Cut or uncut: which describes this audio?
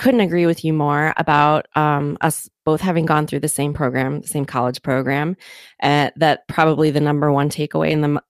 uncut